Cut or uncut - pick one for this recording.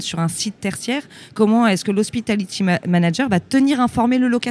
uncut